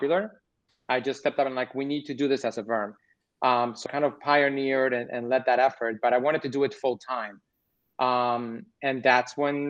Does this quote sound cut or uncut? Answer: cut